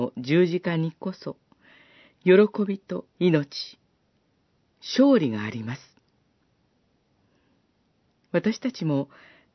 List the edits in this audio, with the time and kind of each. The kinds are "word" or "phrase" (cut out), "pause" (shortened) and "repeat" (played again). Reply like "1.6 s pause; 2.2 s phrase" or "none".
3.1 s pause